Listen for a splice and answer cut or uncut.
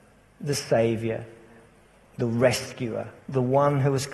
cut